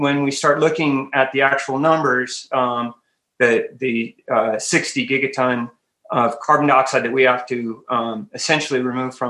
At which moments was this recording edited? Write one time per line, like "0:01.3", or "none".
none